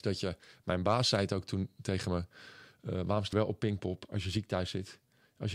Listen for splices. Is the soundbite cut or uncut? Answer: cut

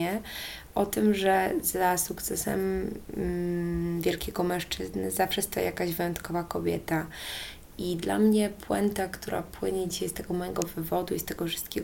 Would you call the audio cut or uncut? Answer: uncut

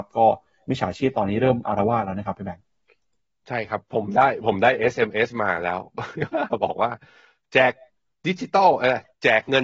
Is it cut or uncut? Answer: uncut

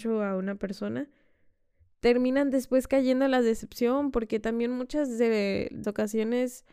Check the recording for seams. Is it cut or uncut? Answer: cut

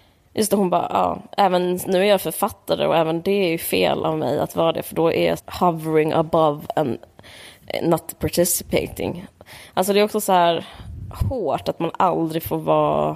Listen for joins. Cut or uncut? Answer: cut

